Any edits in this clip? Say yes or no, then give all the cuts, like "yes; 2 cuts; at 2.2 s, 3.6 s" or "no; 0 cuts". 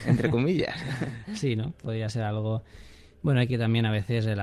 yes; 2 cuts; at 1.8 s, 3.5 s